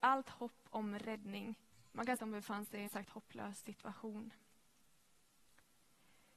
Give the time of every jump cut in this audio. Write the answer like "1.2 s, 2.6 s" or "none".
1.7 s, 2.2 s, 2.9 s